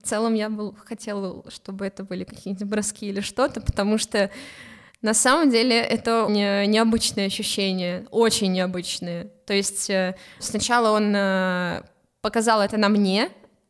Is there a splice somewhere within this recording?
yes; 2 cuts; at 6.3 s, 10.4 s

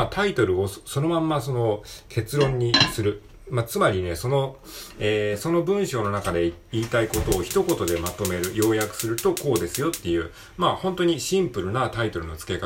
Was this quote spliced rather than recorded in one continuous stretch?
no; 0 cuts

